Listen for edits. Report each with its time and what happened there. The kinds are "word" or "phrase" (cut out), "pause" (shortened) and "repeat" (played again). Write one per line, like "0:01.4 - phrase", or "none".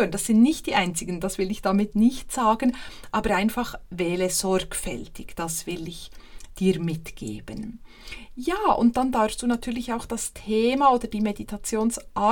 none